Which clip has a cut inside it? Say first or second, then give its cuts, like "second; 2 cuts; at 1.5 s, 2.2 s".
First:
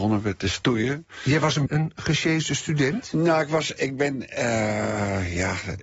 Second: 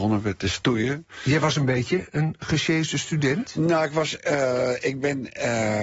first; 2 cuts; at 1.7 s, 3.8 s